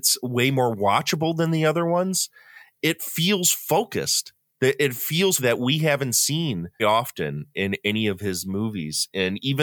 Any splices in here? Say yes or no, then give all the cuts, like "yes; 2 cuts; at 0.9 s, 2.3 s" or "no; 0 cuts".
yes; 2 cuts; at 5.4 s, 6.8 s